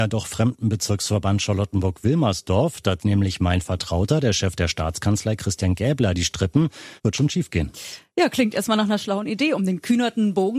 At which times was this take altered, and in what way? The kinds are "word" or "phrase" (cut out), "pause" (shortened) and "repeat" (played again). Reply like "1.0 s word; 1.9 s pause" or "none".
3.0 s word; 7.0 s pause